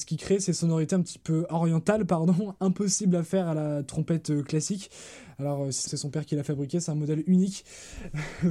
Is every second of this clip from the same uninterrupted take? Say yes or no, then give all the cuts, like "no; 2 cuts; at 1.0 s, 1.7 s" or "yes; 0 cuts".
no; 2 cuts; at 1.5 s, 5.9 s